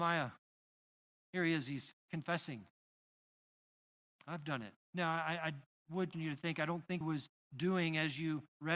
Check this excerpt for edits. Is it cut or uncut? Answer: cut